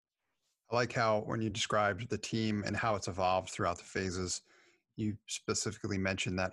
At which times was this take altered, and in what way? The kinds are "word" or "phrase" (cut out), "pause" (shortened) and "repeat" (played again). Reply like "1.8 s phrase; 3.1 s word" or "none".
none